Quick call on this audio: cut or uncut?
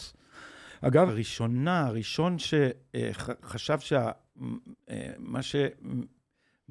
cut